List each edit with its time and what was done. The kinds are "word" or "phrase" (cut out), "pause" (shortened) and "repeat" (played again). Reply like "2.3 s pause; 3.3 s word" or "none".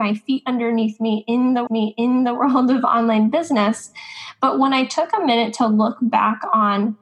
1.7 s repeat